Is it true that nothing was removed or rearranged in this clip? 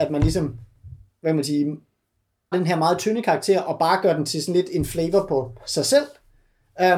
no; 2 cuts; at 1.1 s, 2.5 s

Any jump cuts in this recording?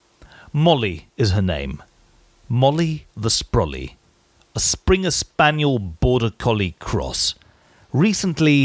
no; 0 cuts

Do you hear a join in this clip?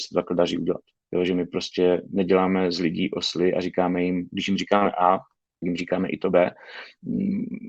yes; 1 cut; at 5.6 s

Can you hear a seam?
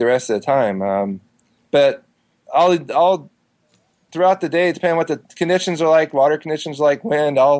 no; 0 cuts

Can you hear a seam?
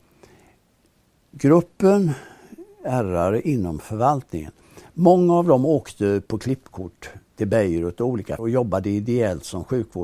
yes; 2 cuts; at 6.3 s, 8.4 s

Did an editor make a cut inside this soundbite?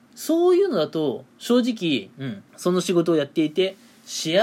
yes; 1 cut; at 2.5 s

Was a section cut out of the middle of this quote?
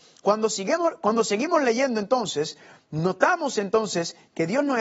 no; 0 cuts

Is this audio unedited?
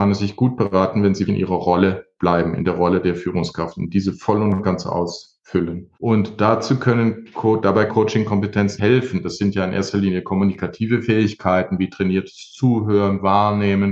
no; 4 cuts; at 1.3 s, 5.9 s, 7.9 s, 8.8 s

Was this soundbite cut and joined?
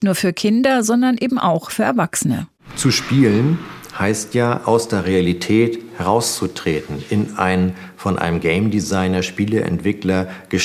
no; 0 cuts

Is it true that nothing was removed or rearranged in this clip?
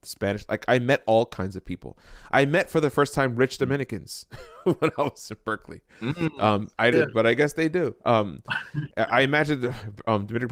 no; 1 cut; at 6.9 s

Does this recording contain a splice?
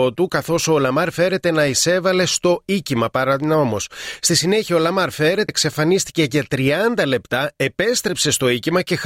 yes; 1 cut; at 5.5 s

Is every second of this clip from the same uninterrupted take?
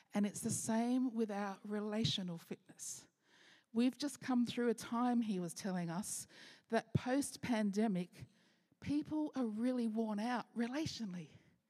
yes; 0 cuts

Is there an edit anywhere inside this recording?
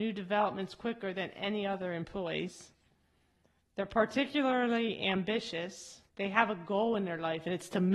yes; 1 cut; at 6.1 s

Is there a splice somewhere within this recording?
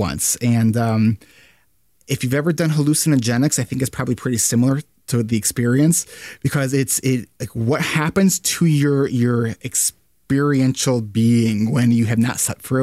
no; 0 cuts

